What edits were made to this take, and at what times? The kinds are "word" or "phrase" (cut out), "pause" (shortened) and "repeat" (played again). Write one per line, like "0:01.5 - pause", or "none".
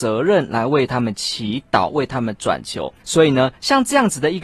0:03.0 - pause